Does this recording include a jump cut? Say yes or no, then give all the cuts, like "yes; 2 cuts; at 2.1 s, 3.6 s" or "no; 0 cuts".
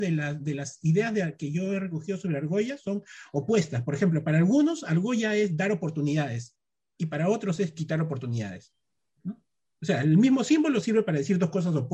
no; 0 cuts